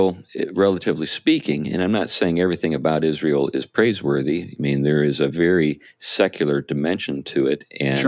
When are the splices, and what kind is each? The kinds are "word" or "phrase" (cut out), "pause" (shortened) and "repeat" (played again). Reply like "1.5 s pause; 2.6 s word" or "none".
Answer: none

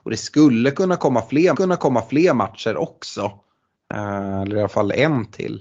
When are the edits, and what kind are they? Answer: 1.5 s repeat

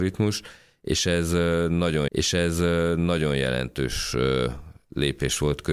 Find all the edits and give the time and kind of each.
2.1 s repeat

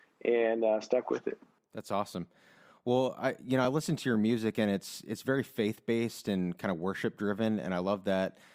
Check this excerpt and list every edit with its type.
none

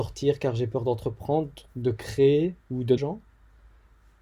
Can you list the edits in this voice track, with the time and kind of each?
1.7 s pause; 2.6 s pause; 3.0 s phrase

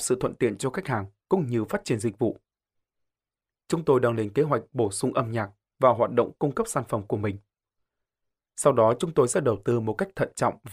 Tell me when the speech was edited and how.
none

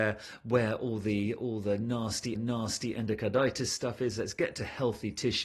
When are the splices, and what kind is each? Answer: 2.4 s repeat

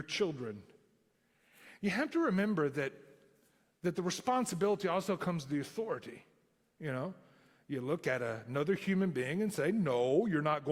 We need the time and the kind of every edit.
none

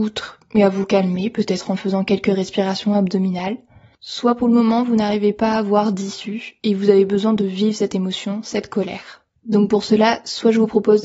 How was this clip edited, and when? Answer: none

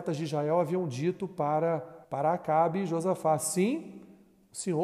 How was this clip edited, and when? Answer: 2.0 s pause

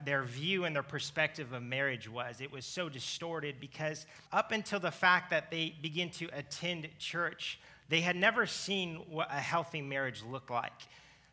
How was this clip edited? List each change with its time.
4.3 s pause

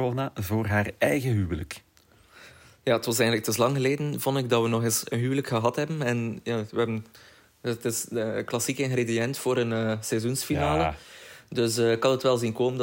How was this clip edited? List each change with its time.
none

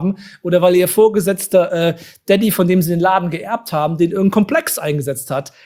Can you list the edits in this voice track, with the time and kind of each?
none

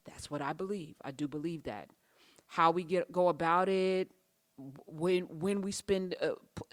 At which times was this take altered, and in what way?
none

